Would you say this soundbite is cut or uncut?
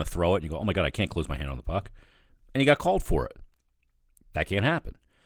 uncut